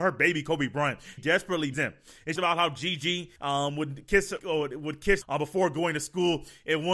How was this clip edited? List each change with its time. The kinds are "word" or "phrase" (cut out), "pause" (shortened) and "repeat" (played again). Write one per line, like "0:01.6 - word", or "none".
0:01.2 - word
0:01.7 - word
0:02.4 - phrase
0:03.4 - pause
0:04.4 - word
0:05.2 - word